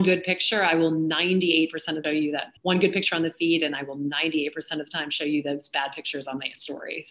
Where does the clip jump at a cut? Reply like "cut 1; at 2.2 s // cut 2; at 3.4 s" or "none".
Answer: cut 1; at 2.0 s // cut 2; at 2.6 s